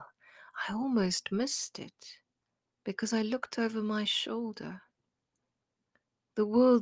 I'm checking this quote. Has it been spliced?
no; 0 cuts

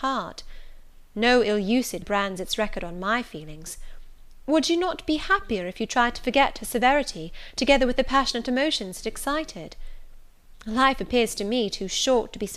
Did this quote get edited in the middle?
yes; 1 cut; at 2.0 s

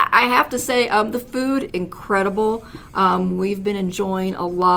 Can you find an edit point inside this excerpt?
yes; 1 cut; at 1.7 s

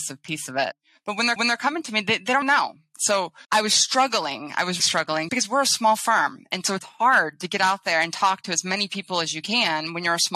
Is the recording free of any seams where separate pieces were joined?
no; 5 cuts; at 1.4 s, 2.4 s, 3.4 s, 4.8 s, 5.3 s

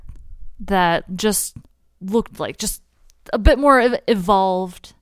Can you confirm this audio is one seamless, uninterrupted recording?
no; 1 cut; at 2.3 s

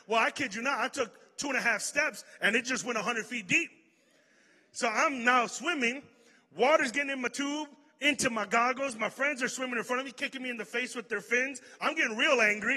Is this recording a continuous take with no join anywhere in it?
yes; 0 cuts

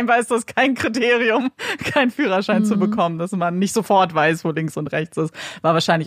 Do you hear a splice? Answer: no; 0 cuts

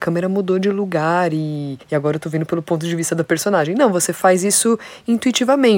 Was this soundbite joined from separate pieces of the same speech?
yes; 1 cut; at 1.8 s

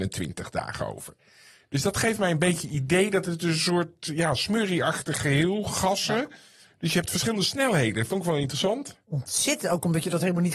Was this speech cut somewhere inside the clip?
no; 0 cuts

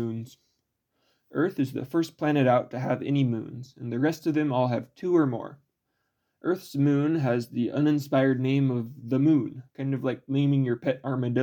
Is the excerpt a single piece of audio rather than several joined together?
no; 1 cut; at 9.7 s

